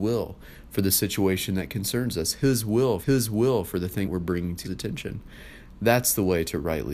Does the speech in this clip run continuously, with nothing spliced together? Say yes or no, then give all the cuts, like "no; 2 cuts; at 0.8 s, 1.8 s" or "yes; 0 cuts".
no; 3 cuts; at 3.0 s, 4.0 s, 4.6 s